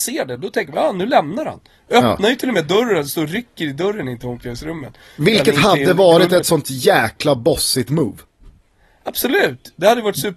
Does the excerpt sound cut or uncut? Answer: uncut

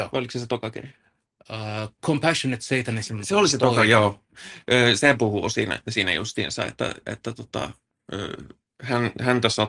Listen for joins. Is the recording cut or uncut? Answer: uncut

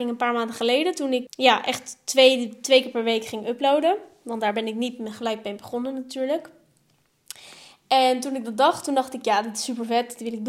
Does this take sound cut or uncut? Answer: cut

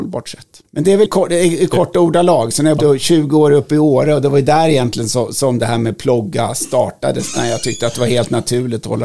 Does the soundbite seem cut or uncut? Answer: cut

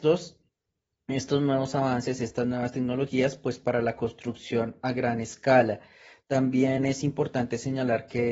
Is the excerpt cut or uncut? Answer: uncut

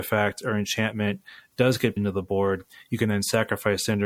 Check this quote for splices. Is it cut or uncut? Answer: cut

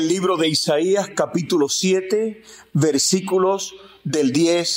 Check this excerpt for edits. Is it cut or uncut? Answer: uncut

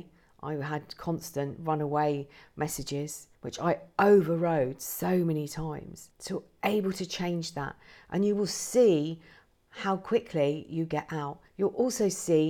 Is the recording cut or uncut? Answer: cut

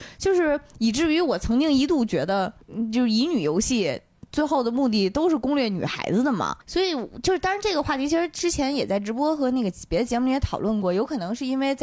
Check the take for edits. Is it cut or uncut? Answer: cut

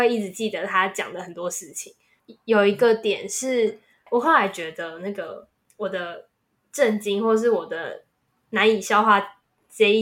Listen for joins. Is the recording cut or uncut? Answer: uncut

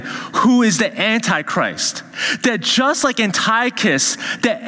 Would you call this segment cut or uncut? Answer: uncut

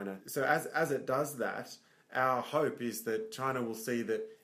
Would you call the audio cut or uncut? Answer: uncut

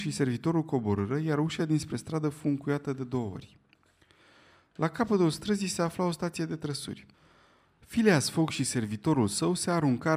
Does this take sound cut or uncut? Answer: uncut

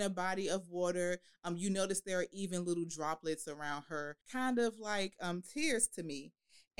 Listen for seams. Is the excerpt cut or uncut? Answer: cut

